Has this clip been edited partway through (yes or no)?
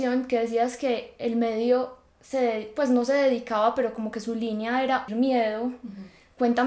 yes